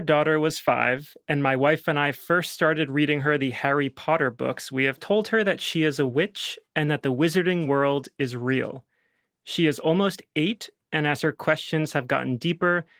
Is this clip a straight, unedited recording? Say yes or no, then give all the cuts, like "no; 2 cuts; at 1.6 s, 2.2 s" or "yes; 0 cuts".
yes; 0 cuts